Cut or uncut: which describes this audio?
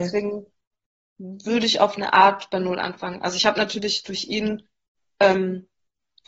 uncut